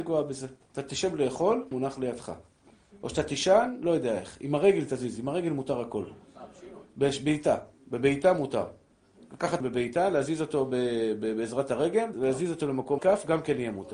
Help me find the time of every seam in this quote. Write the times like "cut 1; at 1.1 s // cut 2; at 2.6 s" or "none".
cut 1; at 1.7 s // cut 2; at 6.9 s // cut 3; at 9.6 s // cut 4; at 12.1 s // cut 5; at 13.0 s